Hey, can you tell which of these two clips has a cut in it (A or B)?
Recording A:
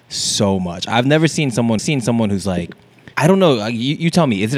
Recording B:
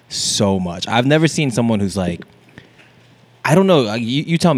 A